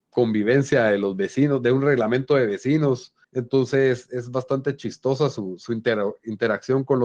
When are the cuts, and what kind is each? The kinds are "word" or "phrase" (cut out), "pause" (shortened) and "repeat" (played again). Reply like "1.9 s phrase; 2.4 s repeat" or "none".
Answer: 3.2 s pause